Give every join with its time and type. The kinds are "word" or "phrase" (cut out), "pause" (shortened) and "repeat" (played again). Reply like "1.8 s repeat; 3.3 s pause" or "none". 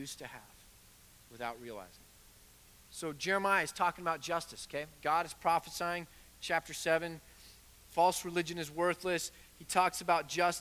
none